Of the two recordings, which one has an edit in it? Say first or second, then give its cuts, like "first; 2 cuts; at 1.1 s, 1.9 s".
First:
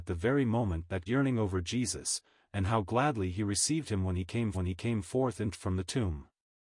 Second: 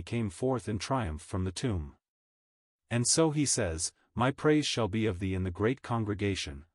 first; 3 cuts; at 1.1 s, 4.5 s, 5.5 s